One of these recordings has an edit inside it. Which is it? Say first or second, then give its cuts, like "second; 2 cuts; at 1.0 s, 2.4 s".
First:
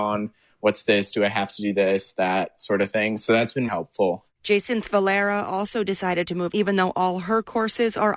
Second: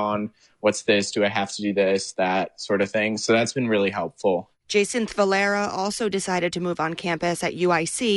first; 2 cuts; at 3.7 s, 6.5 s